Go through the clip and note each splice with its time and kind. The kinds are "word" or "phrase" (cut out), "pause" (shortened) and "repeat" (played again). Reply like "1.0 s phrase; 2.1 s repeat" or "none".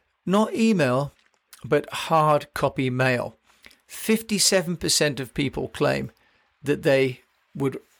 none